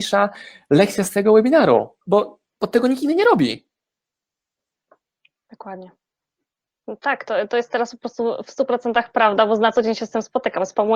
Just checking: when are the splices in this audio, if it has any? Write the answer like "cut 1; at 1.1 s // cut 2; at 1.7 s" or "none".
cut 1; at 2.0 s